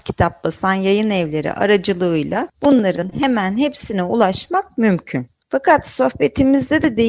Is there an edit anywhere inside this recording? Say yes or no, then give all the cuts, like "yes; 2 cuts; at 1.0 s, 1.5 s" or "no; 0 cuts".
no; 0 cuts